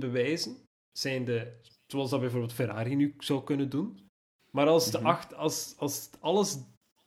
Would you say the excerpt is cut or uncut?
uncut